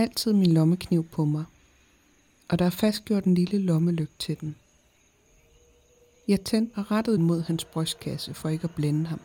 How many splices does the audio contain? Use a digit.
2